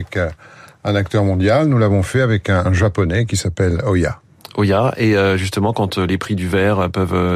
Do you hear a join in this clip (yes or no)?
no